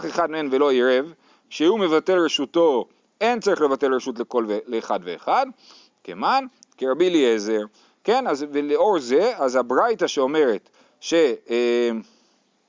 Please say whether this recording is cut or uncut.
uncut